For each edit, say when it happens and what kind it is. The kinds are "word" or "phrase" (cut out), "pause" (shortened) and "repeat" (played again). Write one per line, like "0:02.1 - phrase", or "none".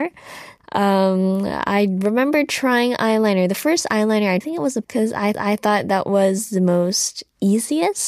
0:04.4 - phrase
0:04.8 - word
0:05.3 - repeat